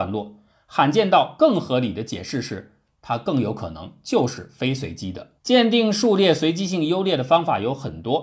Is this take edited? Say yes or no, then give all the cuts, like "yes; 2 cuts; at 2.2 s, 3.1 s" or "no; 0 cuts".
yes; 1 cut; at 5.4 s